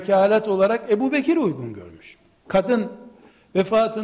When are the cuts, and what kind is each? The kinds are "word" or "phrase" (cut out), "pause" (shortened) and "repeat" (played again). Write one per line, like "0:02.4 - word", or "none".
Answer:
0:02.4 - pause